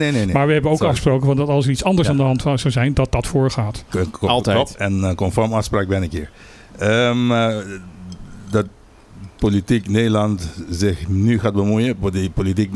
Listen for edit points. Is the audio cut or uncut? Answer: uncut